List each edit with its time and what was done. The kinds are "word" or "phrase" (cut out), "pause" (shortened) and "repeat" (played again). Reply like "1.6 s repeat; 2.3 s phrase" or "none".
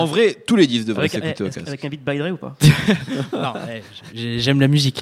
none